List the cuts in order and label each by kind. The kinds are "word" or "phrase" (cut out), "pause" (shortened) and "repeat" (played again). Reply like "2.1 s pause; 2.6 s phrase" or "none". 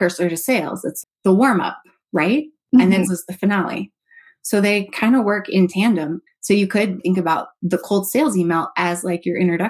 1.0 s word; 3.1 s word; 6.3 s pause; 7.0 s word

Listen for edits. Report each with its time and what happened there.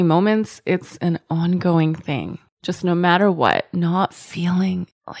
none

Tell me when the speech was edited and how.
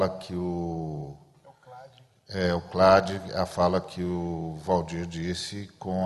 none

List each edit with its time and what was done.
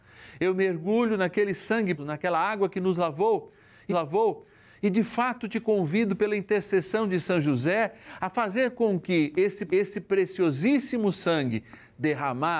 2.0 s word; 3.9 s repeat; 9.7 s repeat

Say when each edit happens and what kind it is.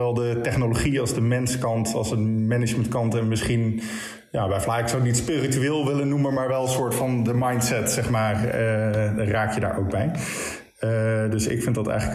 none

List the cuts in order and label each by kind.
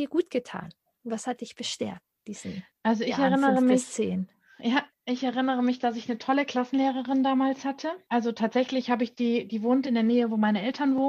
none

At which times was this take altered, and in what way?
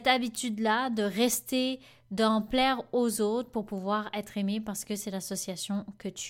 none

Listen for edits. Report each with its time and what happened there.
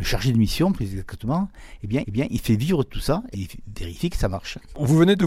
2.0 s repeat; 3.3 s word

